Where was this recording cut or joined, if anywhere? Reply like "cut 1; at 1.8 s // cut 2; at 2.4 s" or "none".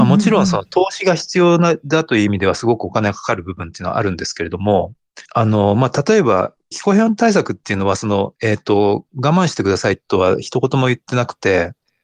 cut 1; at 5.3 s // cut 2; at 6.7 s // cut 3; at 8.4 s